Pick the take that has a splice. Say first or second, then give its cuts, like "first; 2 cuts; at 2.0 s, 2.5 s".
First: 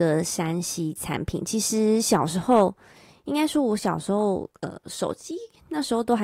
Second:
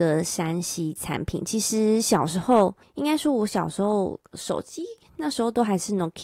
second; 2 cuts; at 2.8 s, 4.3 s